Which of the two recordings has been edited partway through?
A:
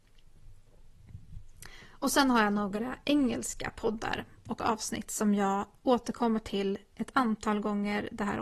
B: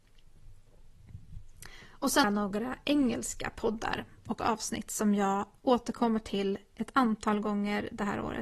B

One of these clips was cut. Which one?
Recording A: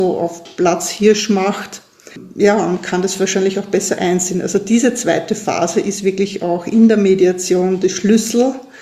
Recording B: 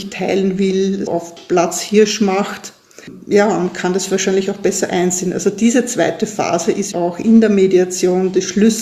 B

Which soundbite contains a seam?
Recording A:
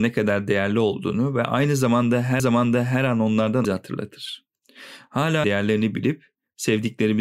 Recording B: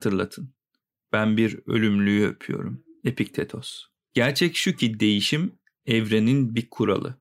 A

